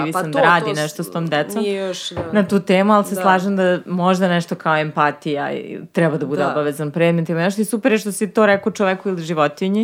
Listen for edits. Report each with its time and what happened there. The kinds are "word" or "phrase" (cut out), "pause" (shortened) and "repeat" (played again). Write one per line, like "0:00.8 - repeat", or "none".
none